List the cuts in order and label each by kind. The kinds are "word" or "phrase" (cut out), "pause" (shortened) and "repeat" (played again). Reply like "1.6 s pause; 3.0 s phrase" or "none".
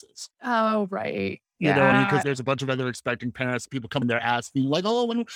1.9 s word; 2.2 s word; 4.0 s word